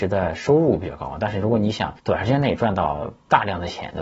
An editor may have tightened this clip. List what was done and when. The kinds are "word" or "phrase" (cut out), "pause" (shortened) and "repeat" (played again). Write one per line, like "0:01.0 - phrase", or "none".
0:02.0 - pause